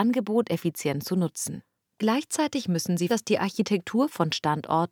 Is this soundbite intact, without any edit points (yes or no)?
no